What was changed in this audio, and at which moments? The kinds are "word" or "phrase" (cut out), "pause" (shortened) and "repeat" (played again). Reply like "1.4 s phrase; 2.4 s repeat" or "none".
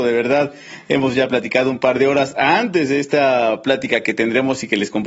none